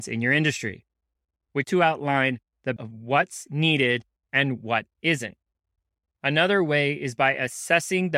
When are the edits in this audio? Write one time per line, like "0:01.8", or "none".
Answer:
0:01.6
0:02.8